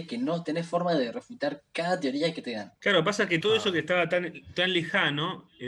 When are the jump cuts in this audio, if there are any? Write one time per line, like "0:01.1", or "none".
0:02.8
0:03.4